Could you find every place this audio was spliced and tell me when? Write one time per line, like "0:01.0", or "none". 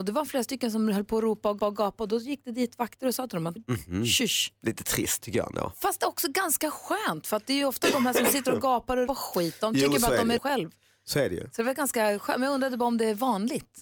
0:01.6
0:03.6
0:09.1
0:10.4